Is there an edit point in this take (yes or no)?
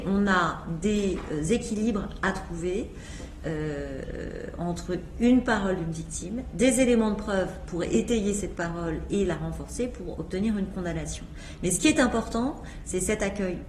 no